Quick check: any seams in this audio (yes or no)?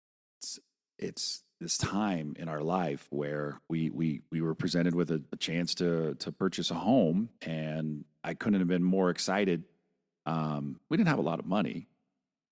yes